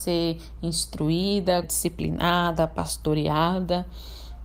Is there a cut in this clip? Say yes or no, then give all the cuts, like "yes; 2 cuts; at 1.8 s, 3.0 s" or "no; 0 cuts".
yes; 1 cut; at 1.6 s